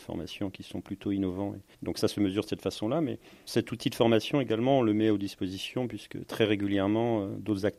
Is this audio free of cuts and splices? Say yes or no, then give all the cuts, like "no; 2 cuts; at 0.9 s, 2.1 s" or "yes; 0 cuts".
yes; 0 cuts